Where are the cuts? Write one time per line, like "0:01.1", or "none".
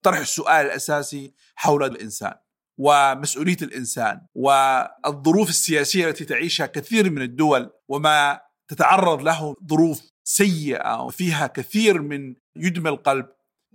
0:01.9
0:04.3
0:07.8
0:09.5